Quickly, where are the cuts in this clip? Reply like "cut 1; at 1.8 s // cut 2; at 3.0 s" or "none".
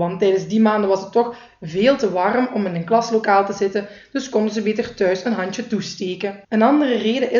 cut 1; at 6.4 s